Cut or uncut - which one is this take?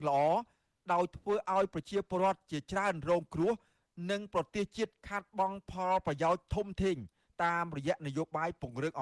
uncut